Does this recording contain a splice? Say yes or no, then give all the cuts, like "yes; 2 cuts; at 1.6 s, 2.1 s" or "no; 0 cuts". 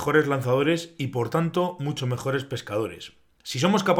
no; 0 cuts